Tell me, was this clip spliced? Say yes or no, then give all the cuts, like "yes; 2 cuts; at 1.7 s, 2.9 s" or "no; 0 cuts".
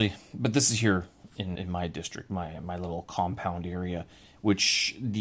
yes; 1 cut; at 1.5 s